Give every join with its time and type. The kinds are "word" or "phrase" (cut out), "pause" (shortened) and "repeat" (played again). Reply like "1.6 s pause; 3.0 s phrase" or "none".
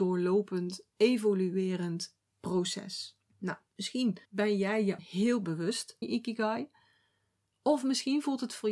3.3 s pause; 4.2 s pause; 5.0 s word; 6.0 s word